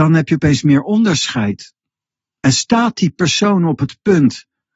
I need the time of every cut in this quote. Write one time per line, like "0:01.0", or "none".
none